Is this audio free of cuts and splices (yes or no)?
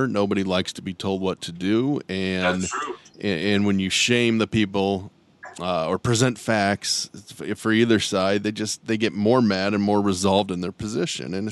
yes